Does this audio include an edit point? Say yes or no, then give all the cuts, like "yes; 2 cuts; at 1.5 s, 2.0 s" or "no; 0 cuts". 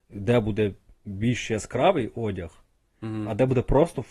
no; 0 cuts